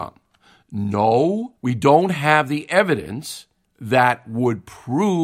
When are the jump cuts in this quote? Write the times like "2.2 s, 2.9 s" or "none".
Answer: 1.6 s, 3.6 s